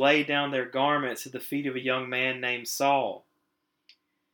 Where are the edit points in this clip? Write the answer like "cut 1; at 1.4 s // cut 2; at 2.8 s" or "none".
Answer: none